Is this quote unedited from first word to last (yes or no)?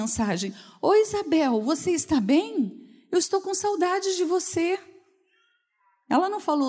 yes